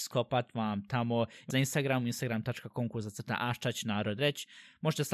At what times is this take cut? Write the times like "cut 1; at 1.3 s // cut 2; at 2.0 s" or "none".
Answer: cut 1; at 1.5 s